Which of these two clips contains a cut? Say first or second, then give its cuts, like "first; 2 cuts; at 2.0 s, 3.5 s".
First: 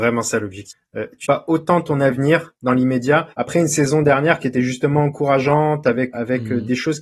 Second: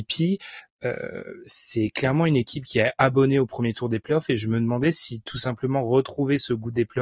first; 3 cuts; at 1.2 s, 3.3 s, 6.1 s